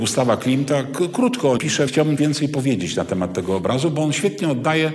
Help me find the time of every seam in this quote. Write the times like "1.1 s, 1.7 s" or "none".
1.6 s, 1.9 s, 2.2 s